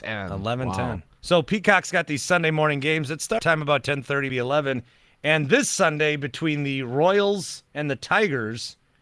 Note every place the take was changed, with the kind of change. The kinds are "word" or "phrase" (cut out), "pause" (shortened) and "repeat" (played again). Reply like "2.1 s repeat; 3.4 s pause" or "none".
1.2 s pause; 3.4 s word; 4.3 s word; 7.7 s pause